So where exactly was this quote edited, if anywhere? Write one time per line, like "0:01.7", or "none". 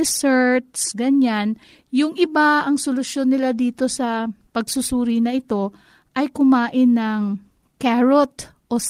none

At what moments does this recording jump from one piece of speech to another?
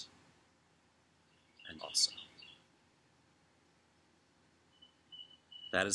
0:01.8

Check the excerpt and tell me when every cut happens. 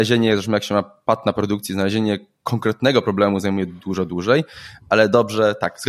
none

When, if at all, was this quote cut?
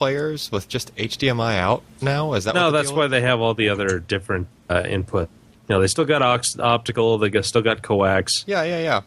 0:04.5
0:05.6

